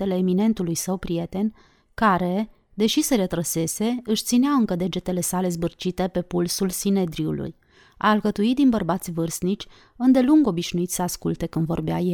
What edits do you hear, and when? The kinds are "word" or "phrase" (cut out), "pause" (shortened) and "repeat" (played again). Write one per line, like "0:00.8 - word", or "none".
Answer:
none